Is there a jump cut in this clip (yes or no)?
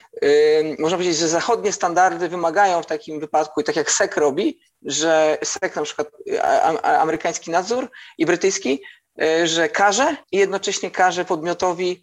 yes